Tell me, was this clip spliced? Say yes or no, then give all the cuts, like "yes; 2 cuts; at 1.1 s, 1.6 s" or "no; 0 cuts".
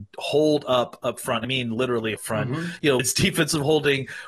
yes; 3 cuts; at 1.4 s, 2.2 s, 3.0 s